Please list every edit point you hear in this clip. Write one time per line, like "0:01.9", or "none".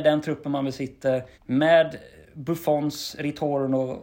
0:01.3